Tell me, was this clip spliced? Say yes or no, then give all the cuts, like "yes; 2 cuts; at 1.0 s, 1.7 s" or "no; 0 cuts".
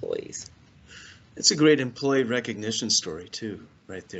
no; 0 cuts